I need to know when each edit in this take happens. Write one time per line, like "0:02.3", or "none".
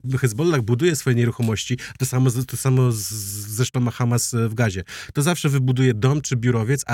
none